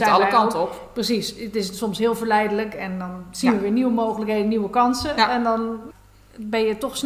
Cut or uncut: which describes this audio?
uncut